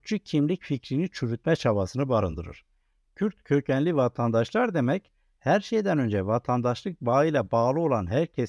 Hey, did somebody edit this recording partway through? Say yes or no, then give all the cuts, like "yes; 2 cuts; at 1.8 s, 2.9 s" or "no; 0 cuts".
no; 0 cuts